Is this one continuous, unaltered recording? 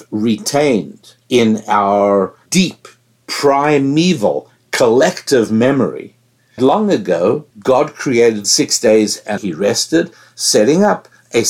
no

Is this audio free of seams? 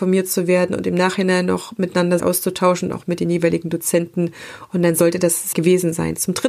no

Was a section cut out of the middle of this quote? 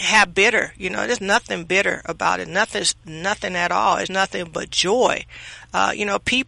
yes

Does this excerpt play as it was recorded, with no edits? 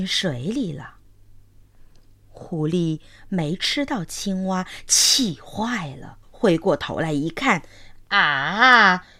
no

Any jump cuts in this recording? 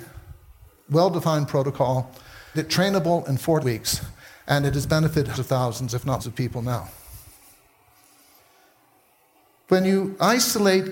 yes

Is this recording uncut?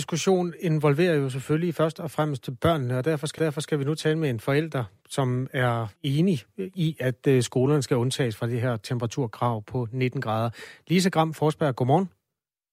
no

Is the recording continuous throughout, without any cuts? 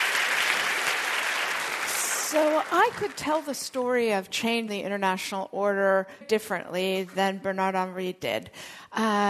no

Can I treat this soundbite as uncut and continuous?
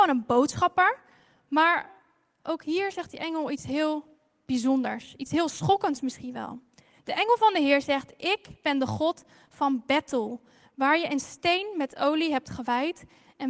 yes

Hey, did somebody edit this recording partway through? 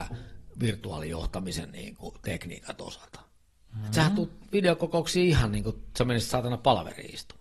no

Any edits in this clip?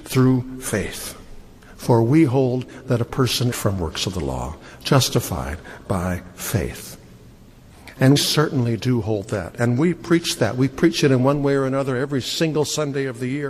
yes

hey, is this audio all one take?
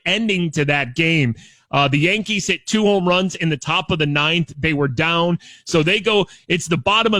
yes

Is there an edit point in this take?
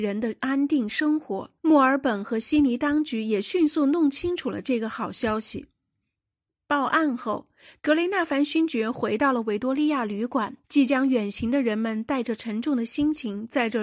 yes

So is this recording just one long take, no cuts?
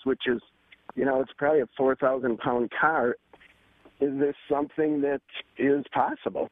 yes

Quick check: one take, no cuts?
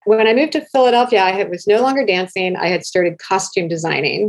yes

